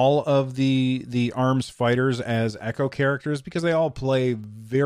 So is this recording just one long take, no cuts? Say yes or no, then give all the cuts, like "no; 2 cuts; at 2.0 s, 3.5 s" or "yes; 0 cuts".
yes; 0 cuts